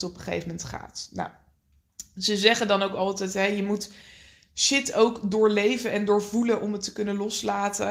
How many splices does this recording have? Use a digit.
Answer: 0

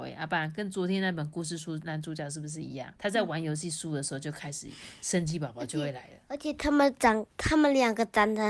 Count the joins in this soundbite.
2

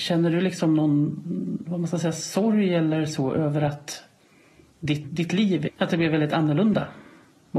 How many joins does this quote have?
1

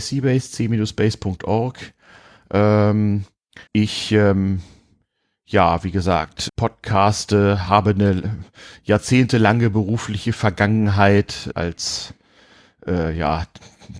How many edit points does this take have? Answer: 3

